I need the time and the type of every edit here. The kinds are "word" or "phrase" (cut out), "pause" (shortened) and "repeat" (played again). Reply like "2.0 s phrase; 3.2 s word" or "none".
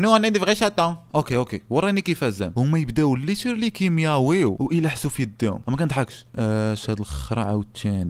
none